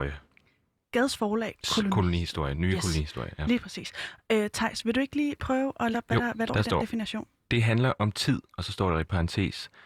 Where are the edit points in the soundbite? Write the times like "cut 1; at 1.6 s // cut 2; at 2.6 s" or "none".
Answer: cut 1; at 5.9 s // cut 2; at 6.5 s